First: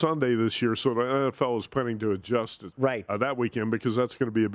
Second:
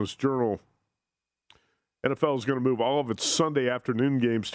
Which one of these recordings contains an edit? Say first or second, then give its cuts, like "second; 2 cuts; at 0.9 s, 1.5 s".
first; 1 cut; at 2.7 s